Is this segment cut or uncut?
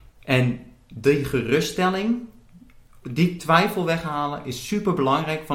uncut